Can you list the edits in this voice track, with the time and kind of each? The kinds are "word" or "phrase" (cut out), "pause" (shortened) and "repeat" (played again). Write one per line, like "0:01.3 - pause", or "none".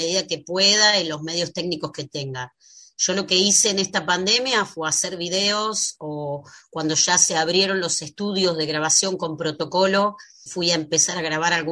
0:10.5 - word